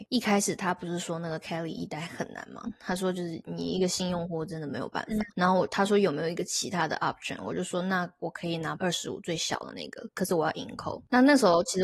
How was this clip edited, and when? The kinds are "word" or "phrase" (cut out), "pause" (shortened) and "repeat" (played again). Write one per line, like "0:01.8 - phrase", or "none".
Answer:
0:08.8 - word